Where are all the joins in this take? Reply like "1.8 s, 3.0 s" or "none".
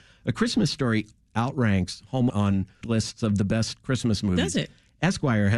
1.3 s, 2.3 s, 2.8 s